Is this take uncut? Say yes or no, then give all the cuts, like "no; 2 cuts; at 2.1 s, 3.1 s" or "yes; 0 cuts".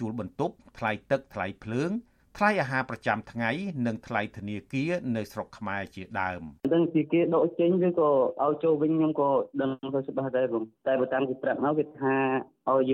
no; 1 cut; at 6.6 s